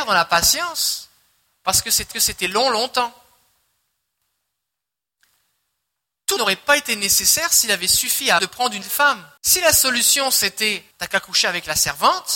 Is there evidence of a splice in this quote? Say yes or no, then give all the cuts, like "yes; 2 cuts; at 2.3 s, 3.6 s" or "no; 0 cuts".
yes; 6 cuts; at 2.1 s, 6.4 s, 8.4 s, 8.8 s, 9.4 s, 10.9 s